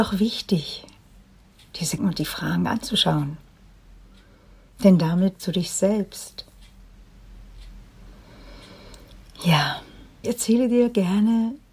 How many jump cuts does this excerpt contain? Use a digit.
3